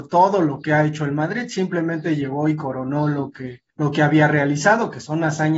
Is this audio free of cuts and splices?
no; 1 cut; at 3.7 s

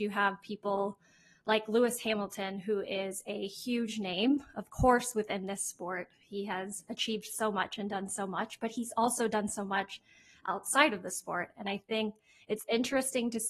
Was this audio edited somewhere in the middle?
no; 0 cuts

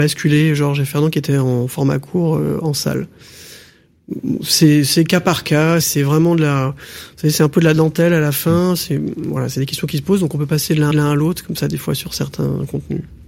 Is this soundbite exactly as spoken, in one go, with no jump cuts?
no; 2 cuts; at 5.8 s, 10.9 s

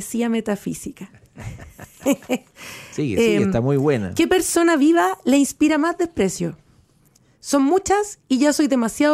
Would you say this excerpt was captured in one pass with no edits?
yes; 0 cuts

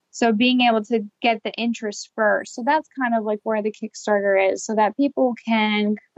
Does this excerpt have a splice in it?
no; 0 cuts

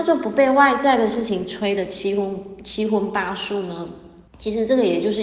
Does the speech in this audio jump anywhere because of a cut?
yes; 1 cut; at 4.3 s

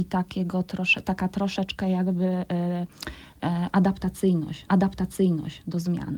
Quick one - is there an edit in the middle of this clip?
yes; 1 cut; at 4.7 s

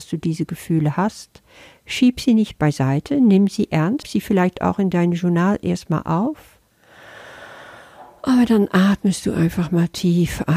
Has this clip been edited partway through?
yes; 1 cut; at 4.0 s

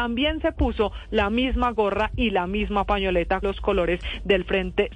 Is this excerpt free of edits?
no; 1 cut; at 3.4 s

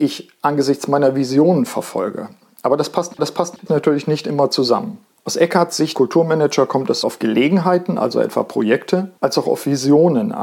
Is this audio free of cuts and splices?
no; 5 cuts; at 3.2 s, 5.1 s, 5.9 s, 7.0 s, 9.2 s

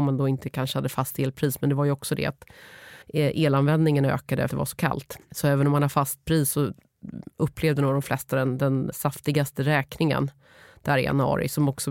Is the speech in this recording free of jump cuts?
no; 3 cuts; at 3.0 s, 4.5 s, 8.9 s

